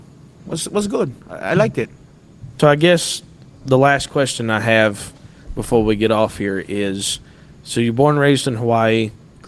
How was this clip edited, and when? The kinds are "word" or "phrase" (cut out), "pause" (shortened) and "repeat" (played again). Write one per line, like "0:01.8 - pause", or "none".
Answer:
none